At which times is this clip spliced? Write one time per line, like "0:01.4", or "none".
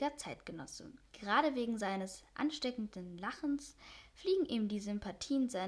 0:01.1